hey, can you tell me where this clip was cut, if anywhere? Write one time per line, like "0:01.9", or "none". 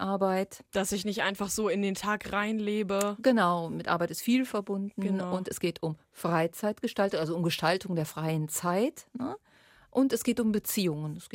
none